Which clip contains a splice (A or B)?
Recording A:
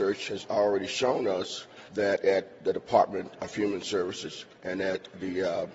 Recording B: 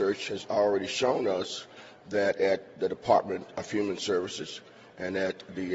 A